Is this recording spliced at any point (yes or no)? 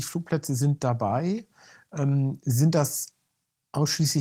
no